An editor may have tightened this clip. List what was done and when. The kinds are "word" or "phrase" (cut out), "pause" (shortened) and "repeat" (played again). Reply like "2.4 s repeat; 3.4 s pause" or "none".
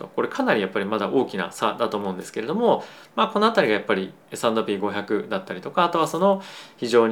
4.2 s pause